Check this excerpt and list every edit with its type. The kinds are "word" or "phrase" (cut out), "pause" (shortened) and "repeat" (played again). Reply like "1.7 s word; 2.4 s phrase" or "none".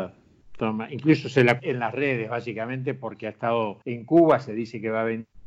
1.6 s word; 3.8 s pause